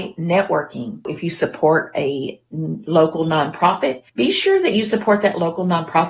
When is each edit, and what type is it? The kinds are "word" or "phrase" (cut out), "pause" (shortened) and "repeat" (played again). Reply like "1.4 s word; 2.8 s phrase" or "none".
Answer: 4.1 s pause